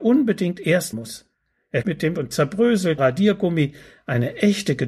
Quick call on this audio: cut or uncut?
cut